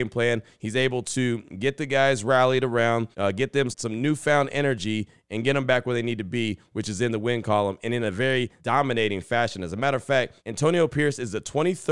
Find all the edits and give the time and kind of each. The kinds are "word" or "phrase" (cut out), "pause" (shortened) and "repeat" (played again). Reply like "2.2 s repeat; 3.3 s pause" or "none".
3.1 s pause; 3.7 s word; 8.6 s pause; 10.4 s pause

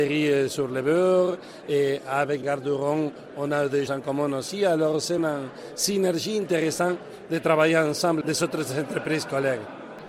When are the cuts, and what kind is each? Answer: 2.4 s word; 3.9 s word; 5.2 s word; 8.2 s word

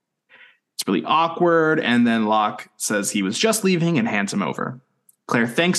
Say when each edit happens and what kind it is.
none

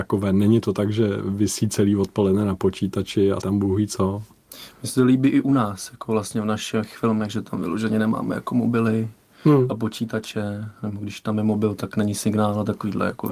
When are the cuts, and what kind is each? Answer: 3.4 s word

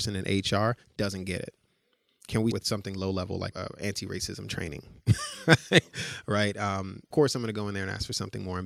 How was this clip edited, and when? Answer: 2.5 s word; 3.5 s word; 7.1 s word

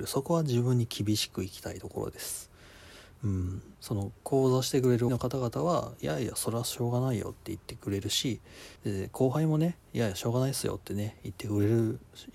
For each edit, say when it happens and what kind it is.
3.7 s pause; 5.1 s word; 8.8 s pause

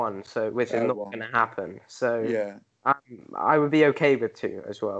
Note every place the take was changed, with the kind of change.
none

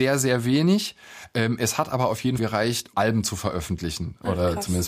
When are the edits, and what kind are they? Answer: 2.4 s word; 2.9 s word

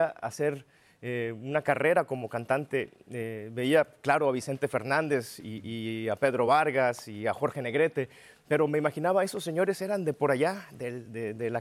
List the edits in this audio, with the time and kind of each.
none

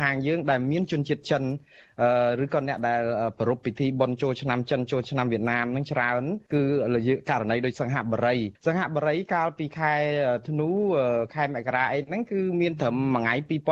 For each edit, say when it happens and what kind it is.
6.5 s pause; 8.5 s pause

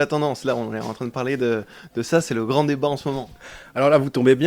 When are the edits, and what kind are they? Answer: none

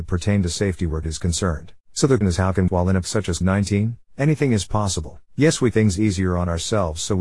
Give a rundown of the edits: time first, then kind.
1.0 s word; 1.8 s pause; 2.2 s word; 2.7 s phrase; 3.0 s word; 3.4 s word; 4.1 s pause; 5.3 s pause; 5.7 s phrase

